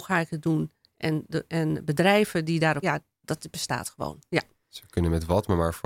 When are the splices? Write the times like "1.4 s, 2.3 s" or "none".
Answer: 1.5 s, 2.8 s